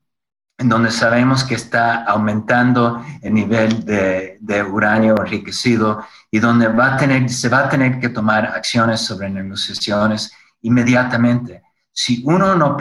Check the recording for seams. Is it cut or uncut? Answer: uncut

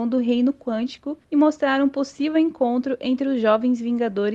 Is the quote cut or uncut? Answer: uncut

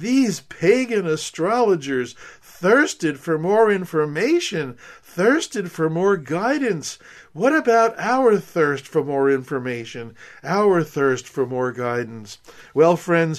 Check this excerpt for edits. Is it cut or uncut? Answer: uncut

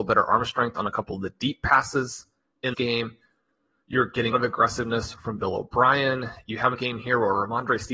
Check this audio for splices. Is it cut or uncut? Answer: cut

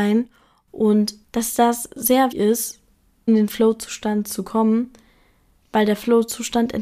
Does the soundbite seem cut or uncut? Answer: cut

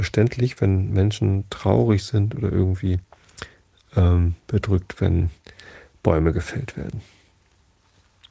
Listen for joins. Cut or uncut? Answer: uncut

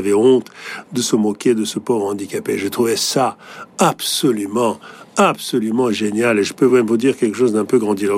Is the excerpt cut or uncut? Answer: uncut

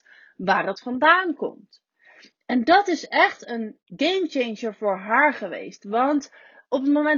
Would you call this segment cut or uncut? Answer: uncut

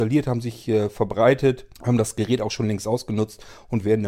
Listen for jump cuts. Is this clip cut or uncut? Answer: cut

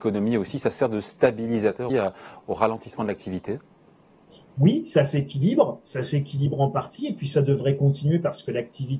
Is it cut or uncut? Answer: cut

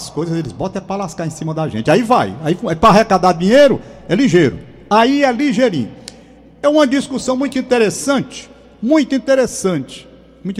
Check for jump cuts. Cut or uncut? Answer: uncut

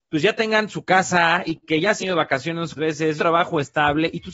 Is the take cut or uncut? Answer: cut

